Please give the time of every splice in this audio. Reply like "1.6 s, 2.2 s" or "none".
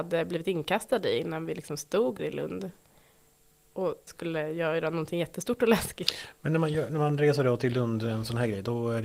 2.2 s, 4.1 s

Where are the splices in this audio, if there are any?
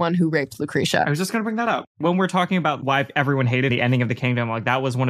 3.7 s

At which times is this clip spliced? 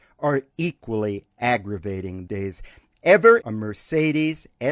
2.3 s, 3.4 s

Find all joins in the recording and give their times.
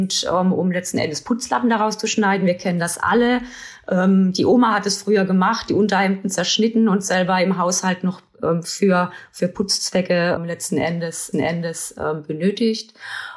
10.4 s, 11.3 s

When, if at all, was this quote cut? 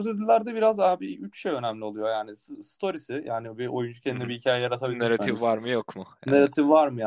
none

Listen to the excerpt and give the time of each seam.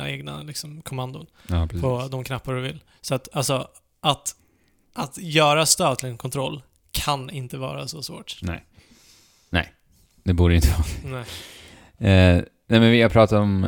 none

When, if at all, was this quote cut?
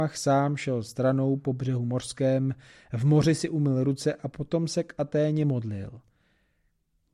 none

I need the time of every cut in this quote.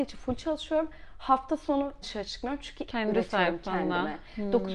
2.0 s, 2.9 s

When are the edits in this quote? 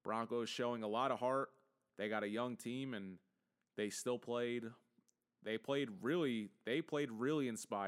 none

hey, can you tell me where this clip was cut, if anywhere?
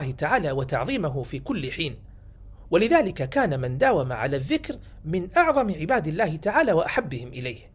none

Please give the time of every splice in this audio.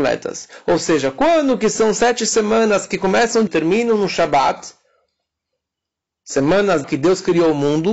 3.5 s, 6.8 s

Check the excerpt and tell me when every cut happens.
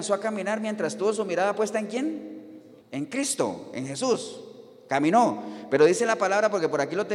2.8 s

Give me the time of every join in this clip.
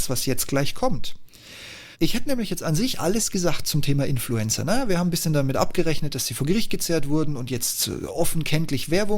1.9 s

